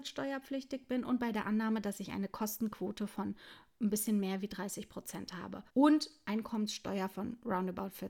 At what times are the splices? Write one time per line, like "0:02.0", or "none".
0:05.7